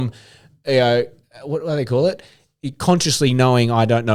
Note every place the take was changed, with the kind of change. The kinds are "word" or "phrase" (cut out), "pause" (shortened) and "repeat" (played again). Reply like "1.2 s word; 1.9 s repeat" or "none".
none